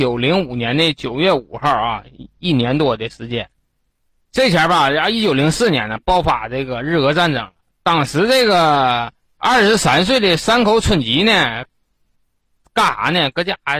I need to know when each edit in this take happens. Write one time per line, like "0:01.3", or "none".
none